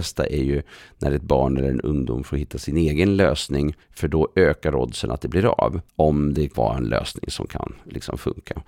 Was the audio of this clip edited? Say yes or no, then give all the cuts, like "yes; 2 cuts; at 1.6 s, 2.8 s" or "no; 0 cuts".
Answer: yes; 3 cuts; at 3.8 s, 5.9 s, 6.5 s